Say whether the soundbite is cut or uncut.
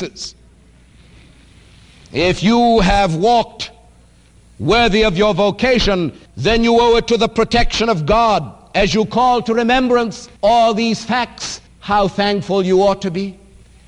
cut